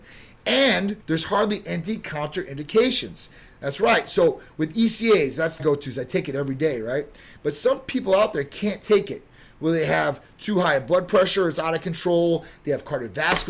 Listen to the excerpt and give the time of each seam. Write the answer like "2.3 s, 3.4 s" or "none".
1.0 s, 5.6 s